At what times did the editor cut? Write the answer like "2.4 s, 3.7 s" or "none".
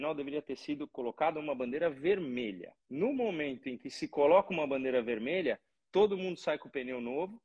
2.8 s